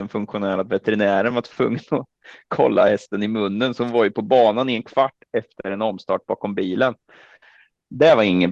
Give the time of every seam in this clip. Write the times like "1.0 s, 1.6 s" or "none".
none